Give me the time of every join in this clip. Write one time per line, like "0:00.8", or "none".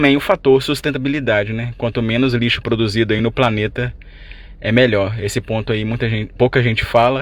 none